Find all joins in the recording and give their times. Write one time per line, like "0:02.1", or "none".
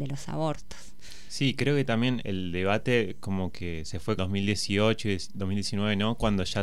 0:02.2
0:04.2